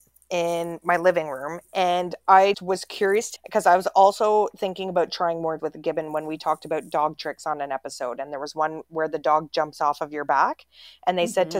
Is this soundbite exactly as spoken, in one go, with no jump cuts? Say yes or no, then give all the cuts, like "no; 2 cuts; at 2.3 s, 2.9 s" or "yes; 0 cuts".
no; 3 cuts; at 2.5 s, 3.4 s, 5.6 s